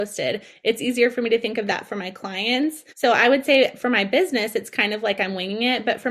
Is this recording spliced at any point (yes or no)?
yes